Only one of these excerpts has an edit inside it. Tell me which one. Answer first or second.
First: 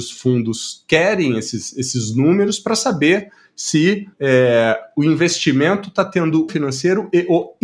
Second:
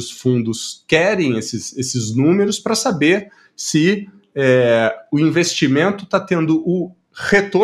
first